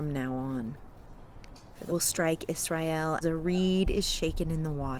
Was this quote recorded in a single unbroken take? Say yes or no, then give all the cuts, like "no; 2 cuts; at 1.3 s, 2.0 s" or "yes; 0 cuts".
no; 2 cuts; at 1.9 s, 3.2 s